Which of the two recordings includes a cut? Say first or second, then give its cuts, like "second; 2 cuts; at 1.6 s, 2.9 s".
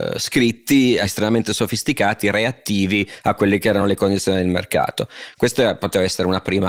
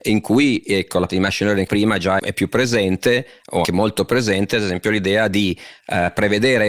second; 4 cuts; at 1.1 s, 1.7 s, 2.2 s, 3.6 s